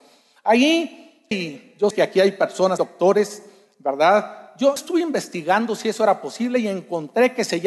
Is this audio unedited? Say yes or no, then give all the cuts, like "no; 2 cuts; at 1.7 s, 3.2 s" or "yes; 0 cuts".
no; 4 cuts; at 1.3 s, 1.9 s, 2.8 s, 4.8 s